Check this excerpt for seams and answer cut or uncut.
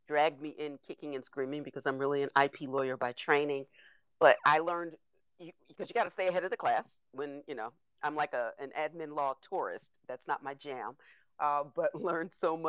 uncut